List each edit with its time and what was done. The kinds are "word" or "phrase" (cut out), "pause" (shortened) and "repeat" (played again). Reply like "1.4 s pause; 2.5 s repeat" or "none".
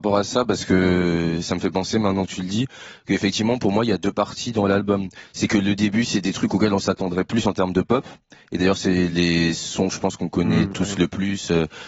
none

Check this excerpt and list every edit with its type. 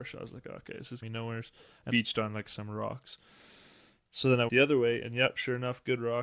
1.0 s word; 1.9 s word; 4.5 s word

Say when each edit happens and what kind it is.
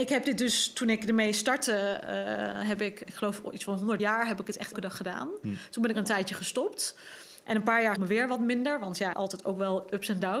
3.1 s word; 4.0 s phrase; 4.7 s word; 5.9 s phrase; 8.0 s phrase; 9.1 s phrase

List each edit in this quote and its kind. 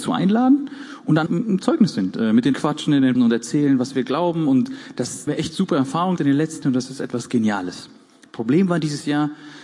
1.3 s word; 2.5 s word; 3.1 s word; 5.3 s word; 6.2 s word; 6.6 s word

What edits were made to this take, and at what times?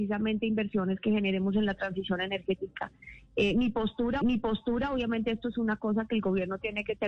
4.2 s repeat

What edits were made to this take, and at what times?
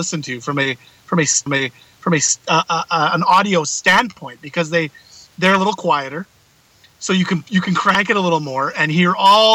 1.5 s repeat

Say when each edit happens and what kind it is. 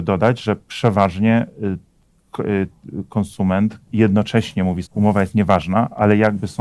3.9 s word; 4.9 s word

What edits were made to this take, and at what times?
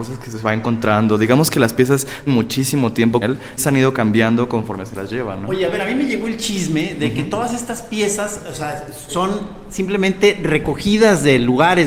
2.3 s word; 3.2 s word; 3.6 s word; 9.1 s word

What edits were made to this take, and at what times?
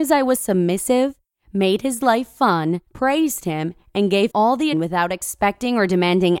2.9 s pause; 4.3 s word; 4.7 s word

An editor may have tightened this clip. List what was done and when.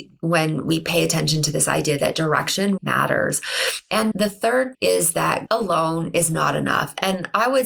2.8 s word; 4.1 s word; 4.7 s word; 5.5 s word

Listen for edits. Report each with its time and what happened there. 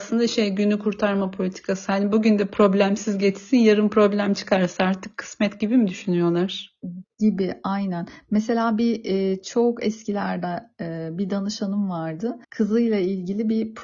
12.4 s pause

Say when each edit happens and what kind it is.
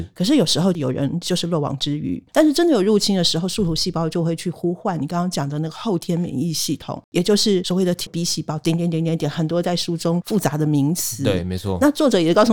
2.3 s pause; 8.1 s phrase

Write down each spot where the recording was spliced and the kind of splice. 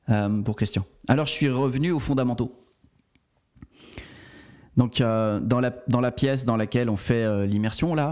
none

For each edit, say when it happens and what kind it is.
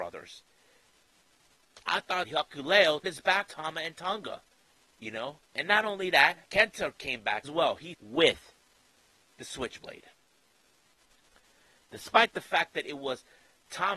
1.8 s pause; 2.2 s phrase; 3.0 s word; 3.5 s word; 4.7 s pause; 5.4 s pause; 6.4 s pause; 7.4 s word; 7.9 s word

